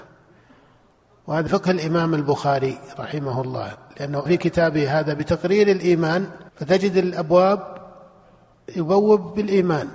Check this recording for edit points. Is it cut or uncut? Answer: cut